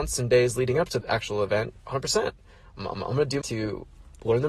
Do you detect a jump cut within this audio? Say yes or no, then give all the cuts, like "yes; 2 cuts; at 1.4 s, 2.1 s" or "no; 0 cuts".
yes; 4 cuts; at 1.0 s, 1.8 s, 2.9 s, 3.4 s